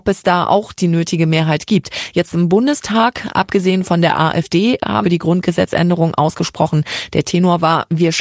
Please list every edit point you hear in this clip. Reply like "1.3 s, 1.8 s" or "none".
5.0 s